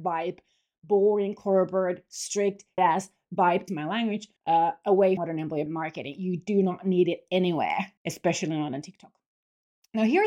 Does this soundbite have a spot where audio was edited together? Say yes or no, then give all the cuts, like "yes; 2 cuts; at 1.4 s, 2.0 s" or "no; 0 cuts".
yes; 6 cuts; at 2.8 s, 3.7 s, 4.4 s, 5.2 s, 5.7 s, 8.0 s